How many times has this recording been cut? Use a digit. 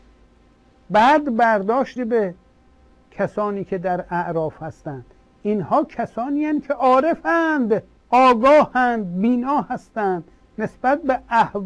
1